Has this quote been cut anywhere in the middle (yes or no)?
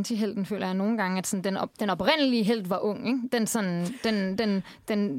no